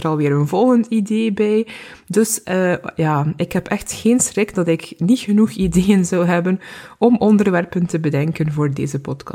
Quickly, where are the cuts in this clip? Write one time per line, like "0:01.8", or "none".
none